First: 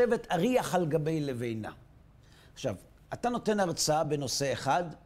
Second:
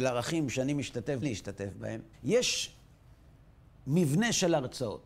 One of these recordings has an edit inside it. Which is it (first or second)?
second